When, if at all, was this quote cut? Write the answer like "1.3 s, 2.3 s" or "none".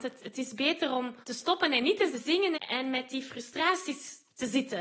1.2 s, 2.1 s, 2.5 s

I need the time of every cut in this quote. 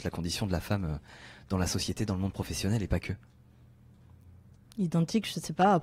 none

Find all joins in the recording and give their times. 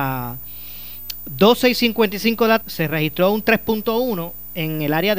2.6 s

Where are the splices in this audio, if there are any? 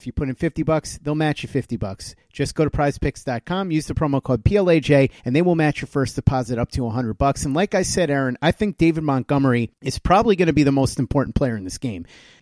5.2 s

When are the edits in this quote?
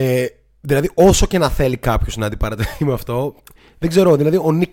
none

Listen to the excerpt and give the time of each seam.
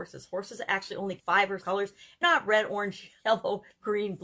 1.2 s, 1.6 s, 2.2 s, 3.2 s

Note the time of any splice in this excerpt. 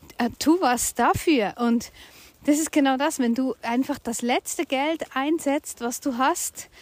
none

